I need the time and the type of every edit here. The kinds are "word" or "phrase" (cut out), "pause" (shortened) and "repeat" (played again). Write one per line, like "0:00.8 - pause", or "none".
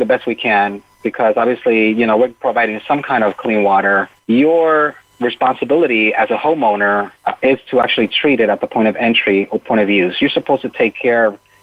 0:04.1 - pause
0:07.2 - pause